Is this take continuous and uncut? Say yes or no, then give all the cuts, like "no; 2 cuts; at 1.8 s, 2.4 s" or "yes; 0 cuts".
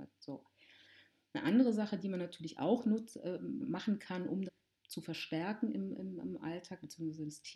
no; 2 cuts; at 3.6 s, 4.5 s